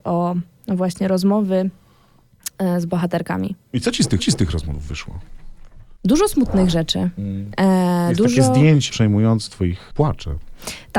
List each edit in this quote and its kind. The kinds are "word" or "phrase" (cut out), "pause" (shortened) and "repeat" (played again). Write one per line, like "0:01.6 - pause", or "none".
0:04.2 - repeat
0:06.0 - pause
0:08.9 - word
0:09.5 - word
0:09.9 - phrase